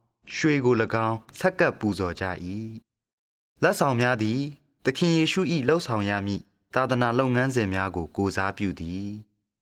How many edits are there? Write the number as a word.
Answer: two